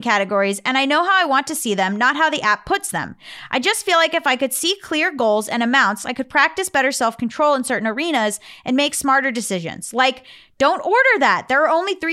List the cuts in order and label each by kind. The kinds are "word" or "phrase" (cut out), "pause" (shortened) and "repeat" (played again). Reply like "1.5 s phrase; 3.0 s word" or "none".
none